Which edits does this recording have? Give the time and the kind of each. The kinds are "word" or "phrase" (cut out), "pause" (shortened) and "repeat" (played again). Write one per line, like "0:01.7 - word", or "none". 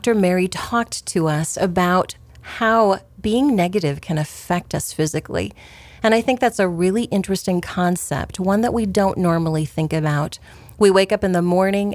none